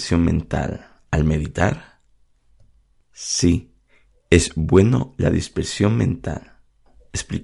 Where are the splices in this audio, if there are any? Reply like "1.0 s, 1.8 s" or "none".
none